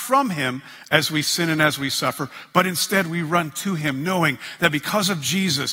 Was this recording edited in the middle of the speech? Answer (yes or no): no